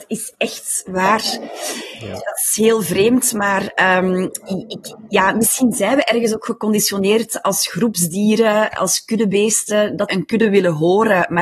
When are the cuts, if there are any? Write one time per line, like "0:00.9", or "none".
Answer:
0:10.1